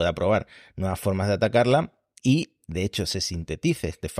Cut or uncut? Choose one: uncut